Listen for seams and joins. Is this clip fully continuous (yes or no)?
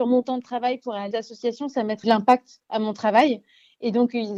no